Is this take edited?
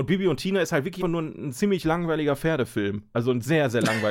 yes; 1 cut; at 1.0 s

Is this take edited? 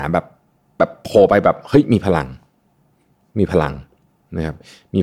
no; 0 cuts

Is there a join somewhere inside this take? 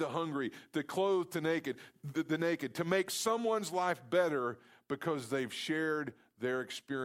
no; 0 cuts

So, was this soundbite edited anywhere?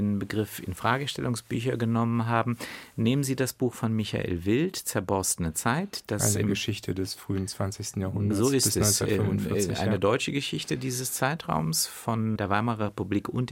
yes; 1 cut; at 12.4 s

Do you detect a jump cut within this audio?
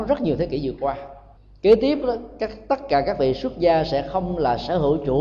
yes; 1 cut; at 1.3 s

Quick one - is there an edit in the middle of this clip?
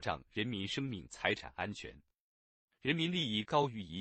no; 0 cuts

